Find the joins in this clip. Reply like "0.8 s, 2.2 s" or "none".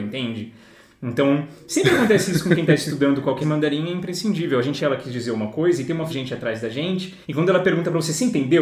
3.4 s, 4.8 s, 6.1 s, 7.2 s